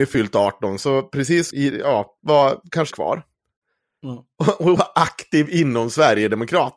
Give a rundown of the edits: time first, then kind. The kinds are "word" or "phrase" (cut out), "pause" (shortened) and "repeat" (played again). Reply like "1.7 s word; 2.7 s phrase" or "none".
1.5 s word; 2.2 s word; 2.9 s word; 4.8 s word